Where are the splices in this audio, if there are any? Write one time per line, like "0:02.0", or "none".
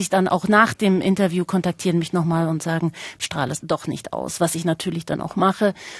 none